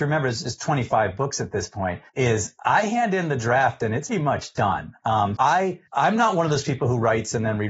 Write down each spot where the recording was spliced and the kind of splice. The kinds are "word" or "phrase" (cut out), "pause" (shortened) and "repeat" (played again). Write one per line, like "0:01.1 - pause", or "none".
0:02.1 - pause
0:04.1 - word
0:05.4 - word
0:05.9 - pause